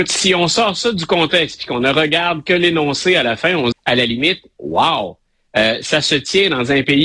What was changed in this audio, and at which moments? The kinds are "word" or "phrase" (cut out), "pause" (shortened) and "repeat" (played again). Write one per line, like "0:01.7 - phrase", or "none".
0:03.7 - phrase